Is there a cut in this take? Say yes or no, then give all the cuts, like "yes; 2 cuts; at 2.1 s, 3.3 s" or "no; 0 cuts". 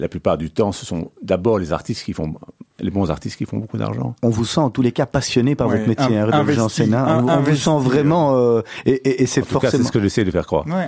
yes; 1 cut; at 2.7 s